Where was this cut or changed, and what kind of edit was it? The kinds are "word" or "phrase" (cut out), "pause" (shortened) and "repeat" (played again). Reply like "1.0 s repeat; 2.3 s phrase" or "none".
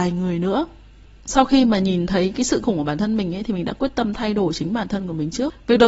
2.6 s word